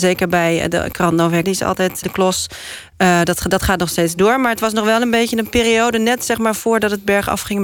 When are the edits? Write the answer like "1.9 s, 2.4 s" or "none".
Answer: 0.9 s, 1.4 s, 2.0 s